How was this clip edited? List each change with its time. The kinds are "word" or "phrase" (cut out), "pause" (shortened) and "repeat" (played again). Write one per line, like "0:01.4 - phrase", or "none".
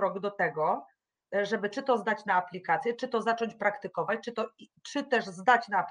none